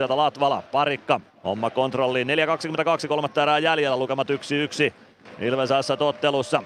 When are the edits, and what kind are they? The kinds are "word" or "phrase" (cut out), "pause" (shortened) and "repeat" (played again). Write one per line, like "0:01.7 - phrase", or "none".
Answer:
0:01.3 - pause